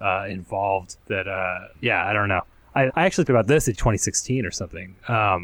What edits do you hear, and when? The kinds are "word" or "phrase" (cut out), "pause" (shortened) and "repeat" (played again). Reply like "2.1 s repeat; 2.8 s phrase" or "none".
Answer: 1.0 s pause; 1.7 s pause; 2.9 s word; 3.3 s word; 3.7 s phrase